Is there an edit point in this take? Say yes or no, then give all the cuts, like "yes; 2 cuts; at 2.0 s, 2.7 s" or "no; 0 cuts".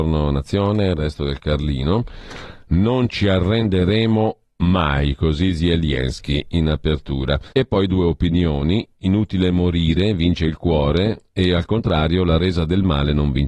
yes; 1 cut; at 7.5 s